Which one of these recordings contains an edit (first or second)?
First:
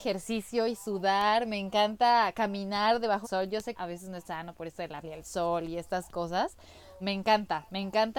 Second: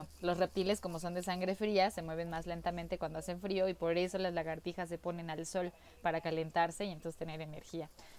first